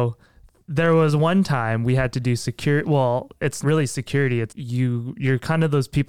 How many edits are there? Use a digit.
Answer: 2